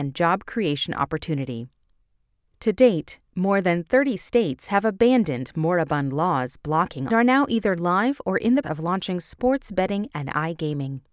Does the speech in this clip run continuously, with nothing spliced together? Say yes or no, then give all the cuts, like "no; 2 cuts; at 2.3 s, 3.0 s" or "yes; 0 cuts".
no; 2 cuts; at 7.1 s, 8.6 s